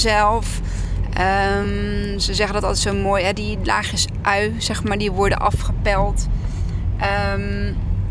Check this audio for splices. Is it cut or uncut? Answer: uncut